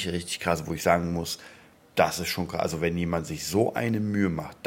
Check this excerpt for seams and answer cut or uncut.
uncut